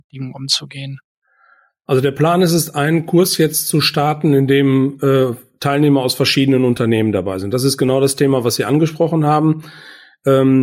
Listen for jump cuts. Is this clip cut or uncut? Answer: uncut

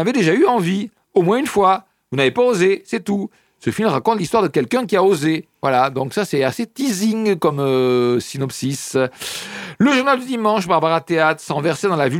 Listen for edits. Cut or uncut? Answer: uncut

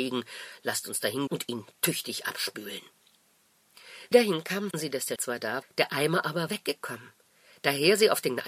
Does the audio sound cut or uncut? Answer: cut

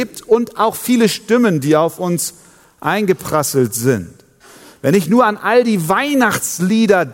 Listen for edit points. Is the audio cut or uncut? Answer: uncut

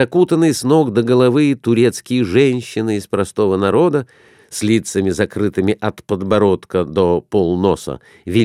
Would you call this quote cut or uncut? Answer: uncut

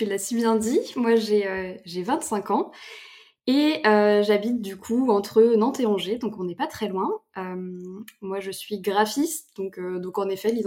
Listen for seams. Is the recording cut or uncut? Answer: uncut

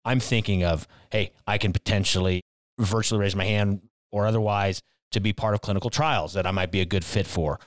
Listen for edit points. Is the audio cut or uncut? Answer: uncut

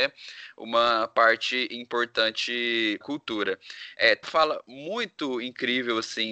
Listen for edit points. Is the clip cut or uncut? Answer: cut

